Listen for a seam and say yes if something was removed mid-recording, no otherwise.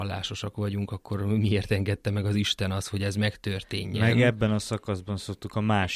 no